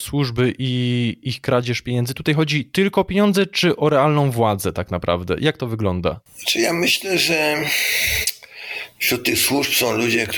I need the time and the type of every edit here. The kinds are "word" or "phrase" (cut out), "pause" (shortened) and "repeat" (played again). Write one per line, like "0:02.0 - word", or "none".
0:06.3 - pause